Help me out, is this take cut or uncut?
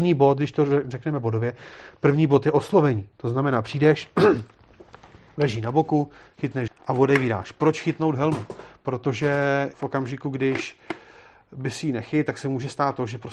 cut